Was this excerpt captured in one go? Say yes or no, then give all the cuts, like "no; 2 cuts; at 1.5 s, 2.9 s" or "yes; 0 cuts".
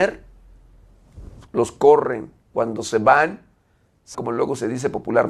no; 3 cuts; at 1.5 s, 2.4 s, 4.1 s